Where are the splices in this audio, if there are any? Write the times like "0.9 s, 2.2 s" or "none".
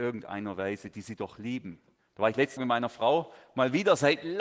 2.0 s, 2.6 s